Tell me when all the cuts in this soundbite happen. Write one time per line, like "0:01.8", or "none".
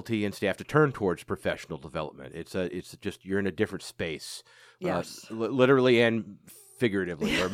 none